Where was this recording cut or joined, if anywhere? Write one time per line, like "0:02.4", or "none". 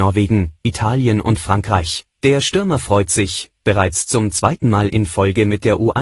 0:02.1

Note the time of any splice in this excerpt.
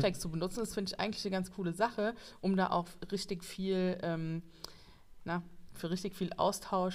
none

